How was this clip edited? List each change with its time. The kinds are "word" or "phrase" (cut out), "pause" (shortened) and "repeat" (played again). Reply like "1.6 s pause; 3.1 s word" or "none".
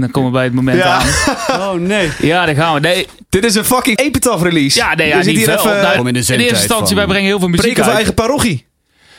4.0 s word; 6.0 s word